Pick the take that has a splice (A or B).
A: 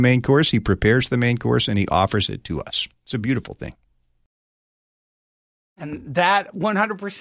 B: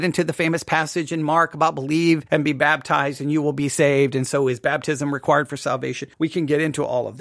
B